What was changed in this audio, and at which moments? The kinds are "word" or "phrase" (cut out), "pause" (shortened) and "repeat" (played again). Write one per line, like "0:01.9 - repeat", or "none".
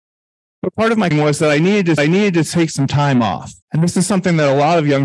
0:01.1 - word
0:02.0 - repeat
0:03.6 - pause